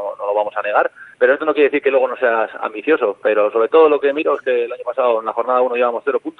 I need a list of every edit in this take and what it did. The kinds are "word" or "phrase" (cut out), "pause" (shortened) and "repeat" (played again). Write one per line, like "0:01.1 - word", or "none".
0:01.1 - pause